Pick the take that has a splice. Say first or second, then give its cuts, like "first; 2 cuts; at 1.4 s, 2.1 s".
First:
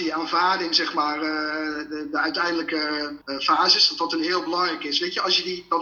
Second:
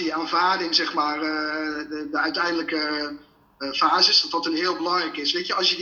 first; 1 cut; at 3.2 s